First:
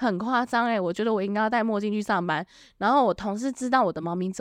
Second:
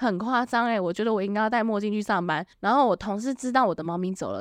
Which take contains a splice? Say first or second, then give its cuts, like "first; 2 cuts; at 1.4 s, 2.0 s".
second; 1 cut; at 2.5 s